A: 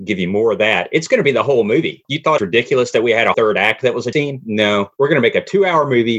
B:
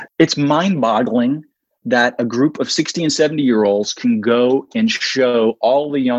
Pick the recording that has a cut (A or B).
A